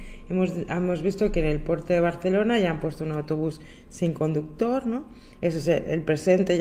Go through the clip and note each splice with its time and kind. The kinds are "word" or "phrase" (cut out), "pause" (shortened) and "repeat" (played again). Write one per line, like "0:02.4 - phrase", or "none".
none